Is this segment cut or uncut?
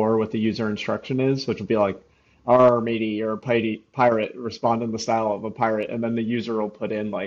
uncut